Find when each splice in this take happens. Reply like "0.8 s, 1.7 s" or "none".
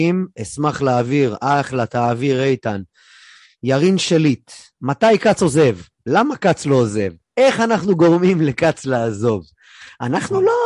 none